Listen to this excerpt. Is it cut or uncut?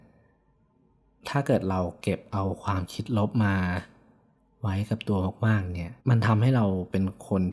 cut